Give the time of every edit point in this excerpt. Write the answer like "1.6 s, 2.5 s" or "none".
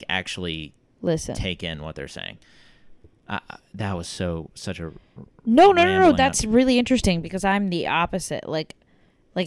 none